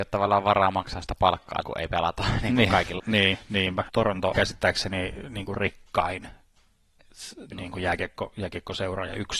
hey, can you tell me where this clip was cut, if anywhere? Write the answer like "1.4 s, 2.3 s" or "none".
1.6 s, 3.0 s, 3.9 s, 4.3 s, 7.5 s